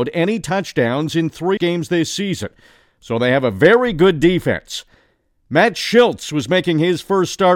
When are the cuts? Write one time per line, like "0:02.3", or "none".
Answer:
0:01.6